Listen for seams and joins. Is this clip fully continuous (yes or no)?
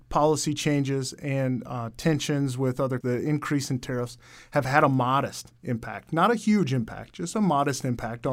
no